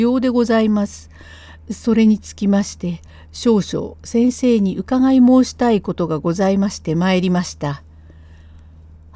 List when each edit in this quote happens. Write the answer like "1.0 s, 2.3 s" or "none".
none